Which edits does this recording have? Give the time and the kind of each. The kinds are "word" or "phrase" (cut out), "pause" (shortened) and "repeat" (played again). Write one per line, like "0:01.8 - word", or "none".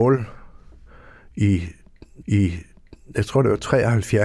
0:02.2 - repeat